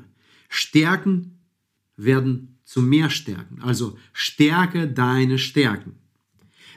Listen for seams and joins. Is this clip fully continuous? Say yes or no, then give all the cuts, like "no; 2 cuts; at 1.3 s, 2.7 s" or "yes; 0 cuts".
yes; 0 cuts